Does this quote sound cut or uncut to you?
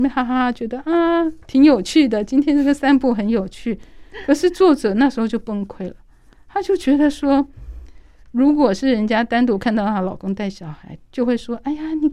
uncut